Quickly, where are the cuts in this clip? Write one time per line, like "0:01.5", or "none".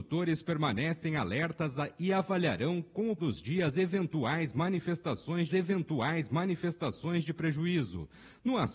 0:03.2
0:05.5

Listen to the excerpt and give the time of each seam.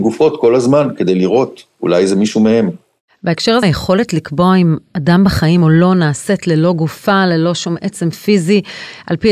0:03.6

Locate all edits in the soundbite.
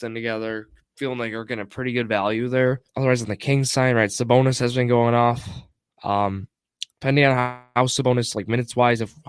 0:02.9
0:06.9

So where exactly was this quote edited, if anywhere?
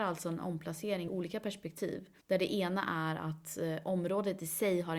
0:01.1
0:02.2

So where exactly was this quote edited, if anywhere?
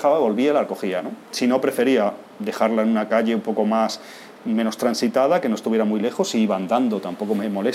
0:01.2

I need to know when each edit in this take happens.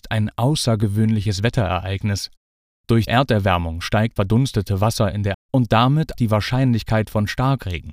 0:03.1
0:04.2
0:05.3
0:06.1

